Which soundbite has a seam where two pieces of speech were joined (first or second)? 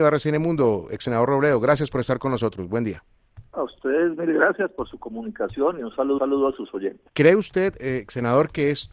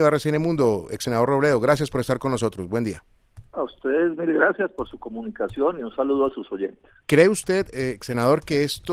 first